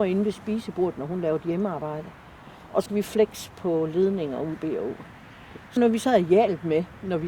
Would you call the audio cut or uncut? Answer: cut